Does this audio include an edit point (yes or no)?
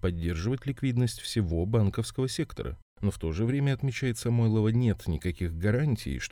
no